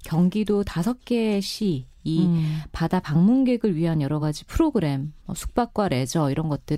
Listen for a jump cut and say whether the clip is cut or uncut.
uncut